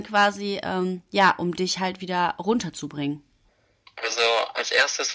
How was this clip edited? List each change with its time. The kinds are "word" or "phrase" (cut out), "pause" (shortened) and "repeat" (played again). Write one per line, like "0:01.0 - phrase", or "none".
0:03.5 - pause